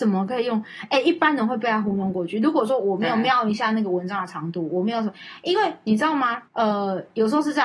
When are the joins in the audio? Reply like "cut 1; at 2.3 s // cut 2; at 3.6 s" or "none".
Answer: cut 1; at 6.5 s